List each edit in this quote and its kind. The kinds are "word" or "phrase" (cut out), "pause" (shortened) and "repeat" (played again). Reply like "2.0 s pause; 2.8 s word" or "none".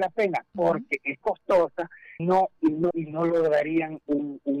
1.2 s word; 2.2 s word; 2.6 s word; 2.9 s word